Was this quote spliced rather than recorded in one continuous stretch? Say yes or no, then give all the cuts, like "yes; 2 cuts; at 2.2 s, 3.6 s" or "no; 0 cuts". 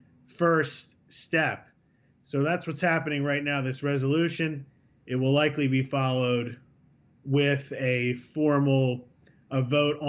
no; 0 cuts